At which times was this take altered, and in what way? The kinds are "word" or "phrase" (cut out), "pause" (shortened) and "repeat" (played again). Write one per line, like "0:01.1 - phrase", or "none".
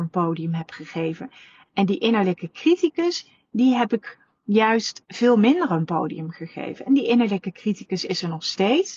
none